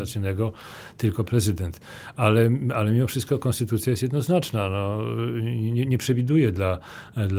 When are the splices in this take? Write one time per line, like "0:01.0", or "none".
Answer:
none